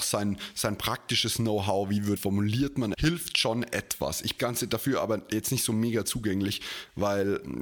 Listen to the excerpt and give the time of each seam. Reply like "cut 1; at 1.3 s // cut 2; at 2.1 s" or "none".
cut 1; at 2.2 s // cut 2; at 2.9 s // cut 3; at 4.4 s